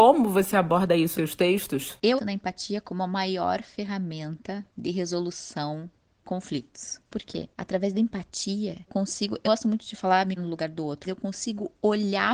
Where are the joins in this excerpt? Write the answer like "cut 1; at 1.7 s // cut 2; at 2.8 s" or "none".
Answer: cut 1; at 1.1 s // cut 2; at 2.2 s // cut 3; at 6.2 s // cut 4; at 8.9 s // cut 5; at 9.4 s // cut 6; at 10.4 s // cut 7; at 11.0 s